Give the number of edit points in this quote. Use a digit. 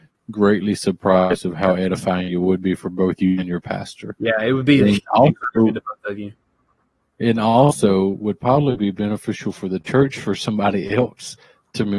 0